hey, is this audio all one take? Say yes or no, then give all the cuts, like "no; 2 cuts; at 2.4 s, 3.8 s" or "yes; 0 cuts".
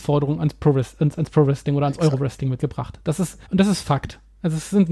no; 2 cuts; at 2.6 s, 3.4 s